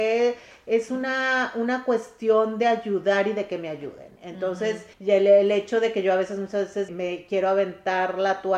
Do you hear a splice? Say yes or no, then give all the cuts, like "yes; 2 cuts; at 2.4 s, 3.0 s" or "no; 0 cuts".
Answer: yes; 2 cuts; at 4.9 s, 6.9 s